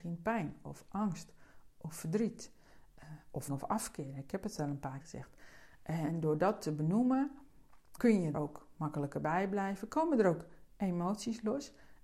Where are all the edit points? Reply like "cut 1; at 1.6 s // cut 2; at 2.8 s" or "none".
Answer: cut 1; at 3.5 s // cut 2; at 5.0 s // cut 3; at 8.0 s // cut 4; at 8.3 s

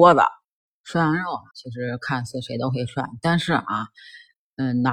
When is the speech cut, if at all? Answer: cut 1; at 1.5 s

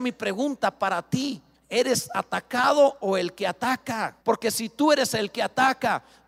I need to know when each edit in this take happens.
cut 1; at 1.5 s // cut 2; at 4.2 s

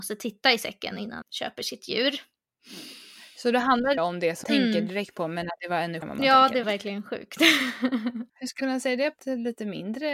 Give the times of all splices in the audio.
cut 1; at 1.2 s // cut 2; at 4.0 s // cut 3; at 4.4 s // cut 4; at 5.6 s // cut 5; at 6.0 s // cut 6; at 6.6 s // cut 7; at 8.6 s // cut 8; at 9.2 s

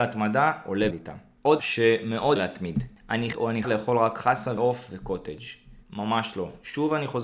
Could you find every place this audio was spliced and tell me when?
cut 1; at 0.9 s // cut 2; at 1.6 s // cut 3; at 2.4 s // cut 4; at 3.3 s // cut 5; at 3.6 s // cut 6; at 4.6 s // cut 7; at 5.8 s

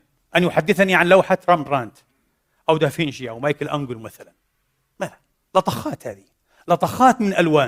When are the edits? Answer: none

